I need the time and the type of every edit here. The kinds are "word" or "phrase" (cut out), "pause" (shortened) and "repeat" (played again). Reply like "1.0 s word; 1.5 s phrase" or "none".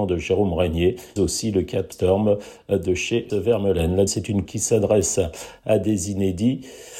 1.2 s word; 1.9 s word; 3.3 s word; 4.1 s word; 4.5 s word